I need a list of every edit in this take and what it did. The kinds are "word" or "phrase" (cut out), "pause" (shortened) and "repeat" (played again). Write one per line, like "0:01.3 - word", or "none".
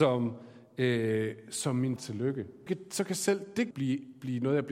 0:02.0 - word
0:02.7 - word
0:03.7 - word